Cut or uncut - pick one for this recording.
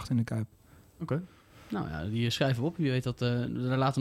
uncut